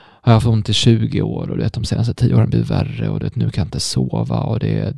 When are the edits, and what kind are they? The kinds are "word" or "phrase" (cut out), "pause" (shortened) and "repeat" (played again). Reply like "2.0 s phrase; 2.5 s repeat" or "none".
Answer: none